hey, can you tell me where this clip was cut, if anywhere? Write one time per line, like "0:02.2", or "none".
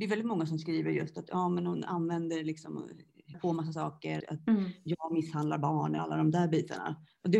0:03.3
0:04.2
0:06.0